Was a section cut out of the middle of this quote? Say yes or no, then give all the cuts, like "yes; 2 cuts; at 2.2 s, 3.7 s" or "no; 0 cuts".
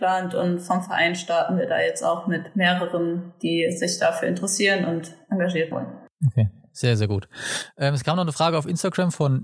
yes; 2 cuts; at 5.7 s, 6.2 s